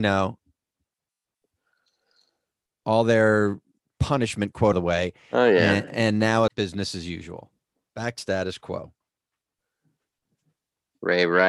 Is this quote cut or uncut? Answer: cut